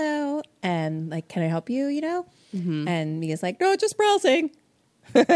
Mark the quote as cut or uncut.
uncut